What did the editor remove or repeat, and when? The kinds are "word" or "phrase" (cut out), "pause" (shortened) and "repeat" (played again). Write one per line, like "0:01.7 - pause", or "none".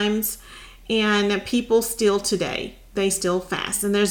none